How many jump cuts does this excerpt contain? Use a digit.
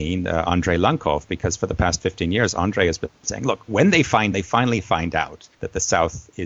2